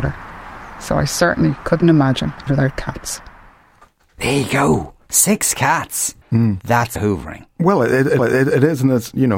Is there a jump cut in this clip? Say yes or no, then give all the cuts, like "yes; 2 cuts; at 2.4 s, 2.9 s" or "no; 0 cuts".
yes; 5 cuts; at 2.5 s, 6.2 s, 7.0 s, 7.5 s, 8.2 s